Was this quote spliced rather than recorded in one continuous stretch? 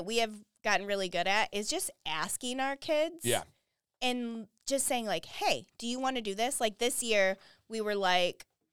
no; 0 cuts

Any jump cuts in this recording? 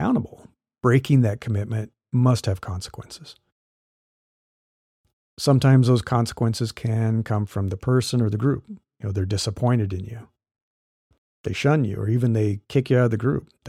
no; 0 cuts

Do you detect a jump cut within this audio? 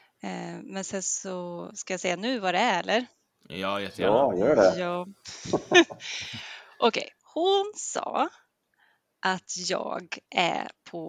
yes; 1 cut; at 7.2 s

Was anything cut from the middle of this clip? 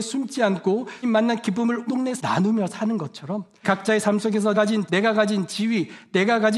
yes; 6 cuts; at 1.0 s, 1.9 s, 2.2 s, 3.6 s, 4.5 s, 4.9 s

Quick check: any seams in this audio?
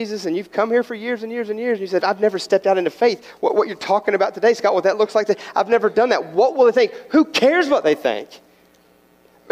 yes; 1 cut; at 2.0 s

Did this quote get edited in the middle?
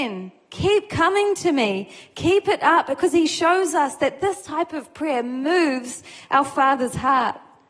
no; 0 cuts

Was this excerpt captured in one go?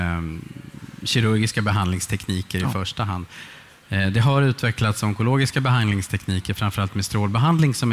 yes; 0 cuts

